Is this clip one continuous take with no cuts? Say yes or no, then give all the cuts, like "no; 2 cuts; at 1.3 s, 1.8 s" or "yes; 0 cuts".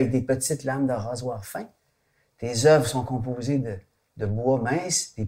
yes; 0 cuts